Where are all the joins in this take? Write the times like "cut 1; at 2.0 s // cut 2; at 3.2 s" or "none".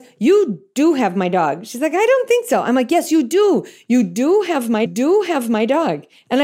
cut 1; at 4.9 s